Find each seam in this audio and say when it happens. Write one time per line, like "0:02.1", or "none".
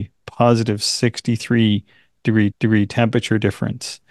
0:02.5